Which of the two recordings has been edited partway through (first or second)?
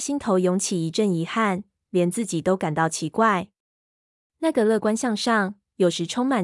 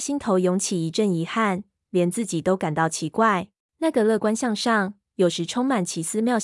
second